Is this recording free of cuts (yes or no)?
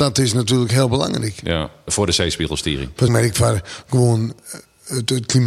no